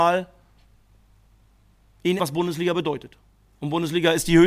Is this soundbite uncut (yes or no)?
no